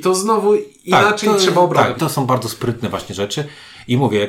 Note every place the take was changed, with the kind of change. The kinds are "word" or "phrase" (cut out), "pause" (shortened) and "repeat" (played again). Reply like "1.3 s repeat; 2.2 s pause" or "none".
2.0 s phrase